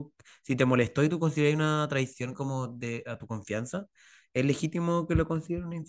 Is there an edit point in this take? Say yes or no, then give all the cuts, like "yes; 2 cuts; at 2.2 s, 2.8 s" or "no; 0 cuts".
no; 0 cuts